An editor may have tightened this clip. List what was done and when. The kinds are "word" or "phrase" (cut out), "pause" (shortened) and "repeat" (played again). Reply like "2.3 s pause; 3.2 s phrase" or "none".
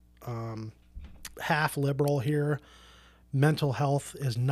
1.3 s word